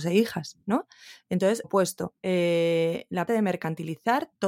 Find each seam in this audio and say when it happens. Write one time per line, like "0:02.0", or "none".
0:01.6
0:02.2
0:03.3